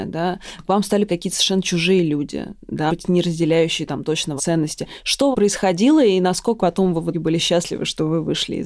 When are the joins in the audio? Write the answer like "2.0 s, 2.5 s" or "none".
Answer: 1.1 s, 2.9 s, 4.4 s, 5.3 s, 6.6 s, 7.1 s